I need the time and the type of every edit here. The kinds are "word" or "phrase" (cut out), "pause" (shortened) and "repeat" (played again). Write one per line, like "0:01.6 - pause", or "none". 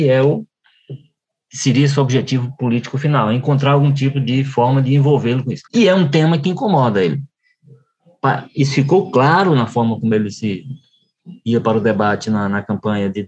0:05.7 - pause